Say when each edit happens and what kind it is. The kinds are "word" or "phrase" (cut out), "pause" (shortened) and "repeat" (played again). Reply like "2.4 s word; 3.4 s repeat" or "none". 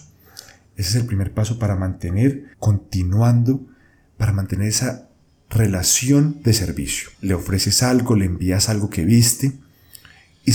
2.5 s pause; 7.1 s pause